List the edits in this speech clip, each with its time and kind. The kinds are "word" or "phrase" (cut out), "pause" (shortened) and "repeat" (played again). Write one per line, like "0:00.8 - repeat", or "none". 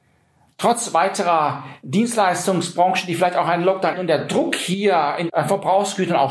0:03.9 - phrase
0:05.3 - word